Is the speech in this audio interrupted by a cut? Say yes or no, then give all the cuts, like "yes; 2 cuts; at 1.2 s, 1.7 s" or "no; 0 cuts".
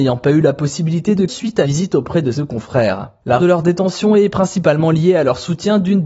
yes; 4 cuts; at 1.3 s, 1.6 s, 2.3 s, 3.4 s